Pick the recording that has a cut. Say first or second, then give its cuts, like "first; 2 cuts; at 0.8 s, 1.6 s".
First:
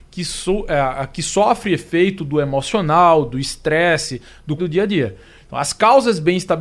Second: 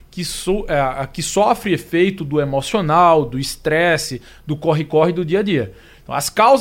first; 1 cut; at 4.6 s